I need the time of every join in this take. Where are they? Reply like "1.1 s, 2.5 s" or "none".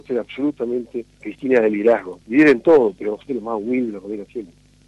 1.1 s, 2.2 s, 3.3 s